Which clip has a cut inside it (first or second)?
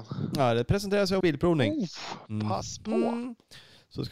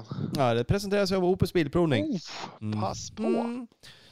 first